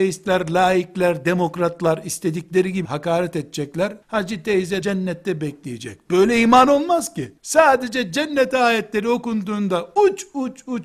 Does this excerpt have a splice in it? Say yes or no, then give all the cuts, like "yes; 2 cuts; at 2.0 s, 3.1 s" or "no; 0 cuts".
yes; 4 cuts; at 2.8 s, 4.0 s, 4.8 s, 7.4 s